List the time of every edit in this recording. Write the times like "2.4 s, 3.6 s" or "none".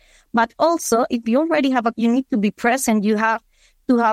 1.9 s